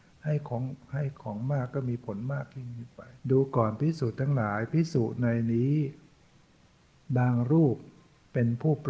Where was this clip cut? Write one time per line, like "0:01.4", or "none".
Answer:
0:03.2